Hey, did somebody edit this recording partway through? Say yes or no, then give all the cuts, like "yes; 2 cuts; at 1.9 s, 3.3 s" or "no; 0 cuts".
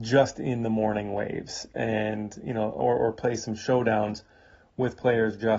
no; 0 cuts